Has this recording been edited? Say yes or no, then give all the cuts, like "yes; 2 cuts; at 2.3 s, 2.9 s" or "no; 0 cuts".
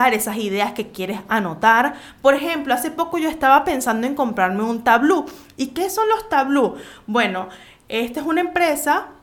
no; 0 cuts